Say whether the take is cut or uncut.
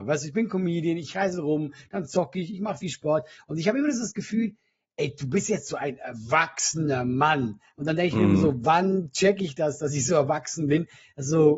uncut